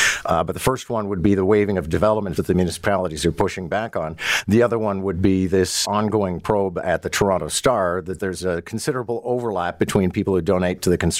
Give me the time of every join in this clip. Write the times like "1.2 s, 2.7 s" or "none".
2.4 s, 5.8 s, 8.2 s